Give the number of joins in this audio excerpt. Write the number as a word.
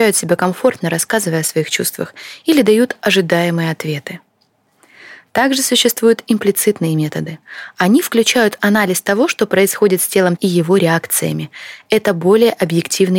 one